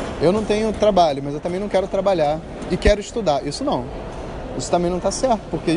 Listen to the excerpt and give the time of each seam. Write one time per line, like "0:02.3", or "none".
none